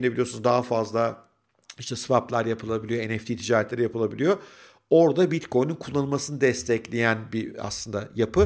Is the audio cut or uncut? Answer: uncut